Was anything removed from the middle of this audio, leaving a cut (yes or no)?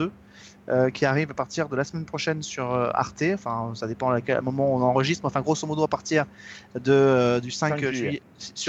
no